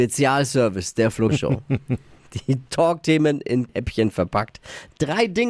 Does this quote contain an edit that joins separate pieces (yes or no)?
yes